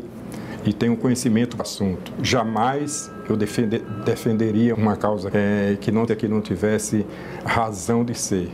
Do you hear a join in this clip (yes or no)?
yes